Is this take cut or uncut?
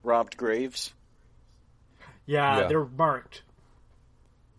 uncut